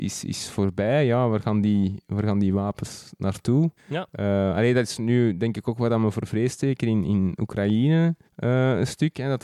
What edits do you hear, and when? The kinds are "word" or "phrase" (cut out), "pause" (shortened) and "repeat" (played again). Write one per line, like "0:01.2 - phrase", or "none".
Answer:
0:03.8 - pause
0:08.3 - pause